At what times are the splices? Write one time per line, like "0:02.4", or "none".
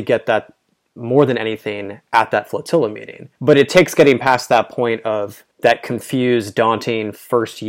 0:03.4
0:05.5